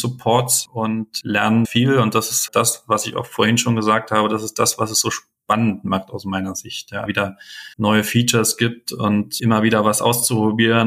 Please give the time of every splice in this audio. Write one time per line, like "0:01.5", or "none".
0:01.6
0:02.5
0:07.1
0:07.7

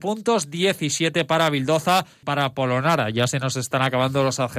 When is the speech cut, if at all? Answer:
0:02.2

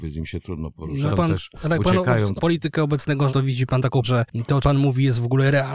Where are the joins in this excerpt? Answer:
0:01.1
0:02.4
0:03.3
0:04.0
0:04.6

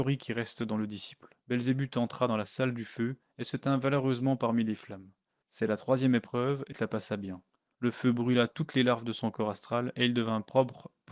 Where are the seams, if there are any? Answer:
0:01.4
0:06.7

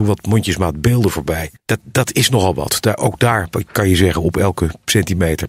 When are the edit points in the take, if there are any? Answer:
0:01.6

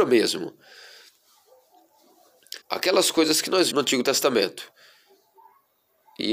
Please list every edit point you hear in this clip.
0:02.6
0:03.7

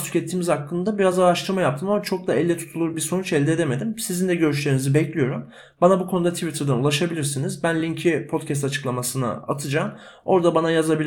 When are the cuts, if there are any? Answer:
none

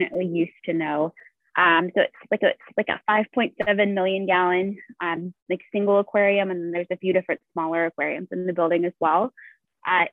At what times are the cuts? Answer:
0:02.4
0:05.4

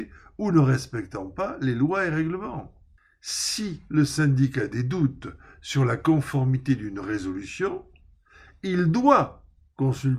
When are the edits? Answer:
none

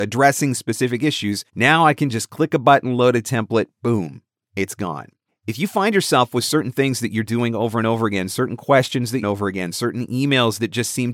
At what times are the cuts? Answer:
0:01.5
0:03.7
0:05.3
0:09.2

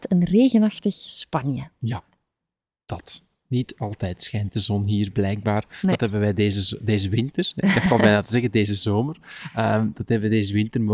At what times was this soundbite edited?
none

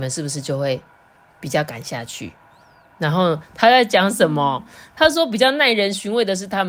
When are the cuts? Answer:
none

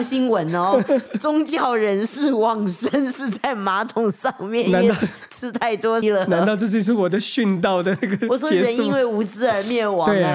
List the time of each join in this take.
0:06.0

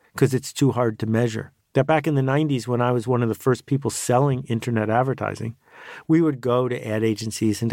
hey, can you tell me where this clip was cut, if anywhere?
0:01.6

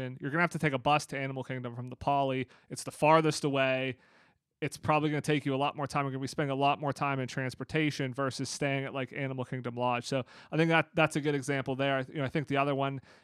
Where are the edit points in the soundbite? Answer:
none

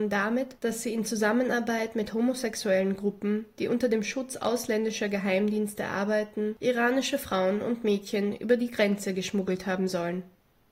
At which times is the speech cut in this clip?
none

